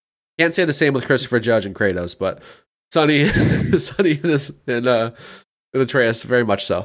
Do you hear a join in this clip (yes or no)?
no